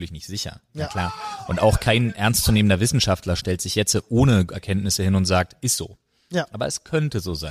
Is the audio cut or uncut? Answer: cut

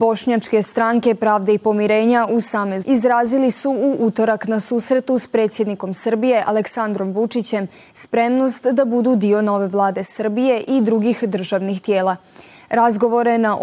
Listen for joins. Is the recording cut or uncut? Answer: cut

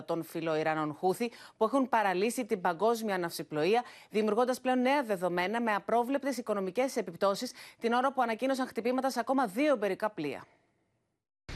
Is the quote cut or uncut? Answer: uncut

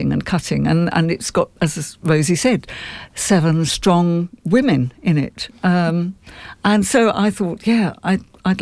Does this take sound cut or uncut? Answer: cut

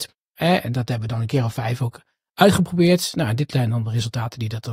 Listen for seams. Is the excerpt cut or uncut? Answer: uncut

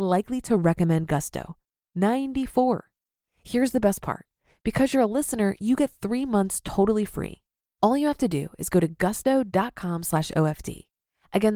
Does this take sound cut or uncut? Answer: uncut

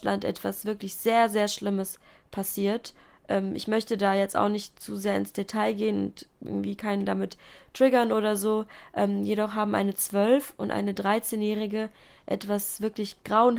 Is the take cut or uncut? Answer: uncut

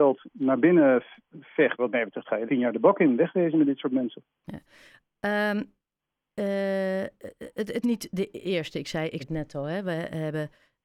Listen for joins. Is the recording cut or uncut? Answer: cut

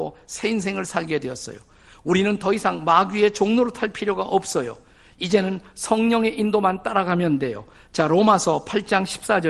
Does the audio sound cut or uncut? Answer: uncut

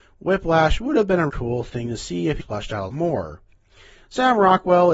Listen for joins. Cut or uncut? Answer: cut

